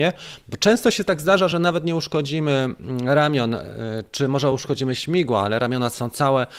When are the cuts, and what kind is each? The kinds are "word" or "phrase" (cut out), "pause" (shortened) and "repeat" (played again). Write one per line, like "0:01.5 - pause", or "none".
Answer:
none